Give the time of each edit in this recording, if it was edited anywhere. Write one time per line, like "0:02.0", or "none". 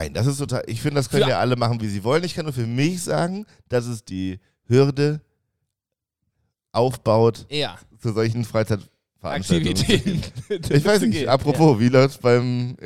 none